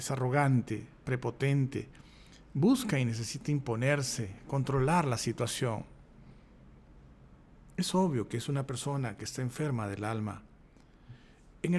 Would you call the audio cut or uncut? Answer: uncut